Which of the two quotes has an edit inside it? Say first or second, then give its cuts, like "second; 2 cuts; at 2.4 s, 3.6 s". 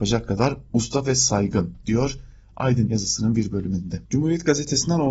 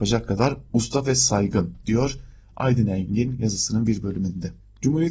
first; 2 cuts; at 2.9 s, 4.1 s